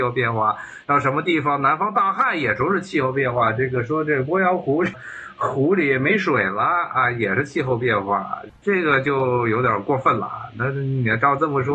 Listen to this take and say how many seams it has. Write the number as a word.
one